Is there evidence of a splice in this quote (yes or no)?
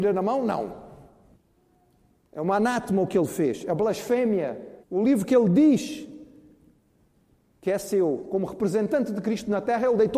yes